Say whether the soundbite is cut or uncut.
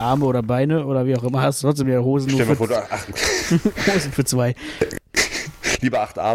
uncut